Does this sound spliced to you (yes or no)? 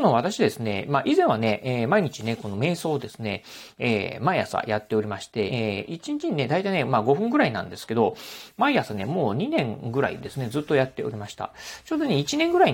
yes